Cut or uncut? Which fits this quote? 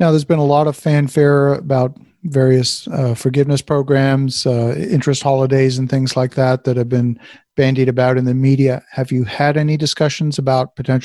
uncut